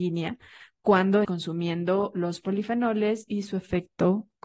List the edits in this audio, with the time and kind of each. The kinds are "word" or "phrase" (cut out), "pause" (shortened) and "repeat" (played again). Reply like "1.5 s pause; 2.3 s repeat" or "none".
1.2 s word